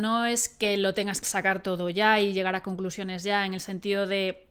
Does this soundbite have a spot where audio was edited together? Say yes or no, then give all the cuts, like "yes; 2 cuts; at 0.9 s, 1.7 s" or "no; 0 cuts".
yes; 1 cut; at 1.2 s